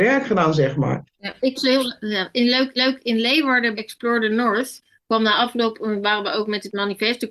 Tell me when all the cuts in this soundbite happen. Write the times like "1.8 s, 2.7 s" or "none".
1.1 s, 1.6 s, 2.8 s, 3.7 s